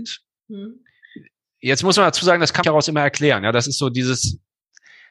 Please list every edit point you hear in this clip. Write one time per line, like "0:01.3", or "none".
0:02.6